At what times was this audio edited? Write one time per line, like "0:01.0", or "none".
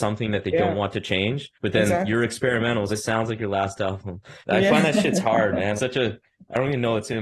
0:01.5
0:02.9
0:04.4
0:05.8